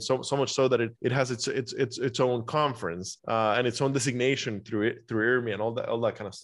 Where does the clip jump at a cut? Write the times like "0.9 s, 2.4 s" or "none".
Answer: 0.9 s, 3.2 s